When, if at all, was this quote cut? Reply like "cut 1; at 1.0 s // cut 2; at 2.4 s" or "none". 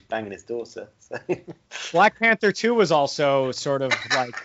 none